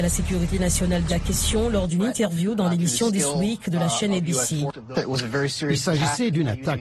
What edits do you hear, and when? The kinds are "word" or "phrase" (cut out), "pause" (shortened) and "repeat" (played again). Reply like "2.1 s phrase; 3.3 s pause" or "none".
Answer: 1.1 s phrase